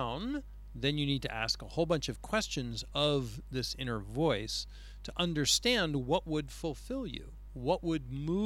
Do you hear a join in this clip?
no; 0 cuts

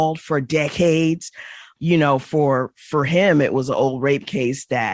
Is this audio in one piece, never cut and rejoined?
yes; 0 cuts

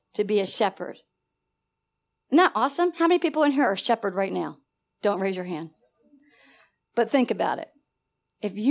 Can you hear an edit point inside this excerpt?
no; 0 cuts

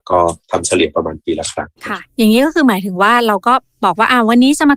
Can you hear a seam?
yes; 1 cut; at 1.8 s

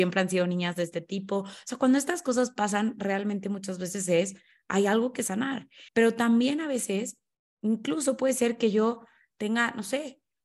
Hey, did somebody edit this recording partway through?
yes; 1 cut; at 5.9 s

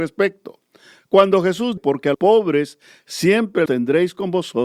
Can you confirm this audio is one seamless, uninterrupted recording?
no; 3 cuts; at 1.8 s, 2.1 s, 3.7 s

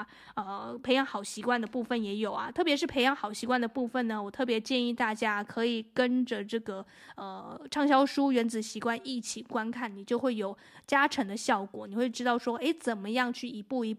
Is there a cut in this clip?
no; 0 cuts

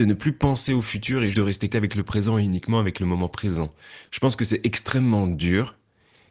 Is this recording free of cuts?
no; 2 cuts; at 1.3 s, 1.7 s

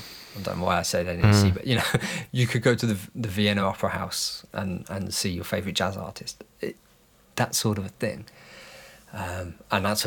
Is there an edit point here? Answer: no; 0 cuts

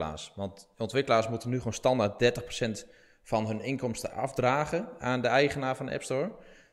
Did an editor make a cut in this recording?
no; 0 cuts

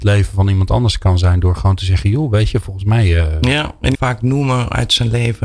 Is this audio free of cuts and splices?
no; 1 cut; at 3.9 s

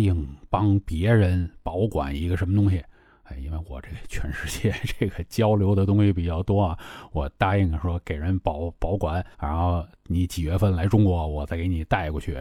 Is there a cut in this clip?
yes; 1 cut; at 9.3 s

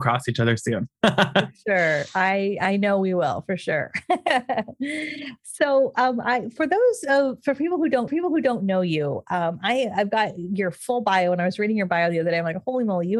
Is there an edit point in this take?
yes; 1 cut; at 8.1 s

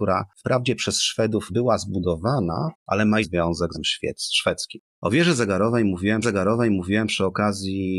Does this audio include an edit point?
yes; 6 cuts; at 1.5 s, 2.8 s, 3.2 s, 3.7 s, 4.9 s, 6.2 s

